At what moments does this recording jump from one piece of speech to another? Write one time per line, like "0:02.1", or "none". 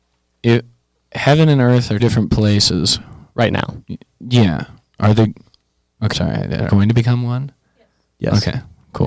0:02.0
0:06.1
0:06.7